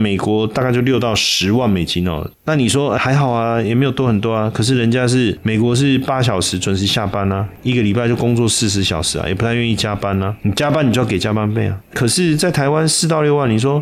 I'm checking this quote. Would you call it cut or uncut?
cut